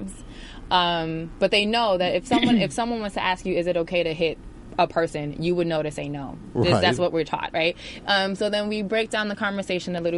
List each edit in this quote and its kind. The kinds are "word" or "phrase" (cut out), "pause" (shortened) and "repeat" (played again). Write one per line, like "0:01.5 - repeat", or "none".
none

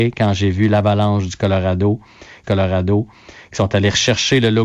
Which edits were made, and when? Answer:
0:02.4 - repeat

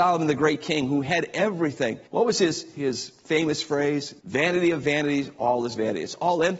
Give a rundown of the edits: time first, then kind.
0:02.1 - pause
0:04.2 - pause

